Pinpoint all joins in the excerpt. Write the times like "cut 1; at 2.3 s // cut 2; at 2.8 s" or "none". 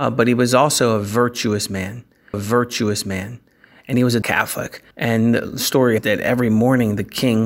cut 1; at 2.3 s // cut 2; at 4.2 s // cut 3; at 4.9 s // cut 4; at 6.0 s